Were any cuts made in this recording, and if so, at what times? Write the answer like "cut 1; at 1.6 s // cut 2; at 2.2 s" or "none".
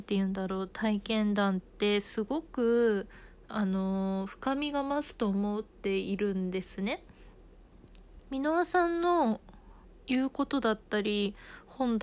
cut 1; at 8.2 s // cut 2; at 9.8 s